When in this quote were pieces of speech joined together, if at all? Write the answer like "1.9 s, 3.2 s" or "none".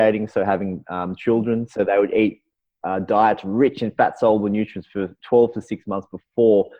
none